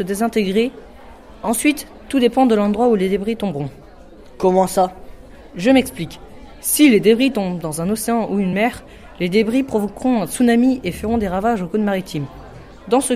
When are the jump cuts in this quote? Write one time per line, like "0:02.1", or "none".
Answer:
none